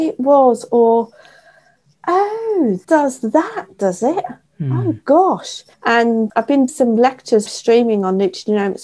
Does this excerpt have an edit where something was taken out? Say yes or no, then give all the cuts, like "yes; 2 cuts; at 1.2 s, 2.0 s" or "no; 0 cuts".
yes; 4 cuts; at 2.8 s, 5.7 s, 6.7 s, 7.5 s